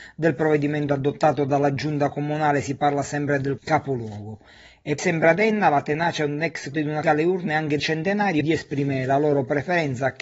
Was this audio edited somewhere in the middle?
yes; 6 cuts; at 3.6 s, 5.0 s, 6.7 s, 7.0 s, 7.8 s, 8.4 s

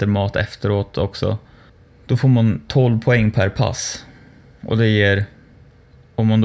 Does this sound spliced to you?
no; 0 cuts

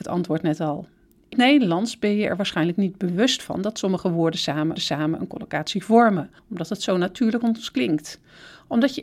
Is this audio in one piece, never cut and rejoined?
no; 4 cuts; at 1.3 s, 4.8 s, 6.4 s, 7.4 s

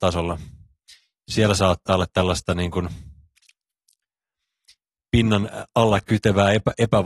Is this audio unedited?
yes; 0 cuts

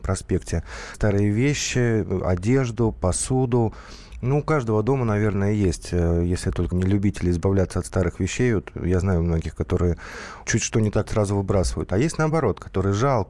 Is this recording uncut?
no; 4 cuts; at 0.9 s, 6.7 s, 10.4 s, 11.0 s

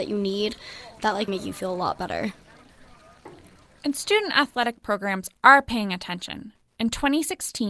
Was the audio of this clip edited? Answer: yes; 1 cut; at 1.3 s

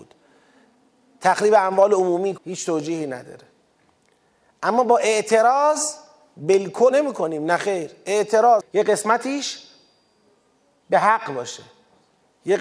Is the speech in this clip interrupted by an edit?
yes; 3 cuts; at 2.4 s, 6.9 s, 8.6 s

